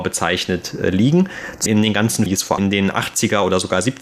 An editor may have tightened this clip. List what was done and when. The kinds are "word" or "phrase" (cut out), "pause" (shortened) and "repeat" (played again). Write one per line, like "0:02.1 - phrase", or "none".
0:01.7 - word
0:02.3 - word
0:02.6 - word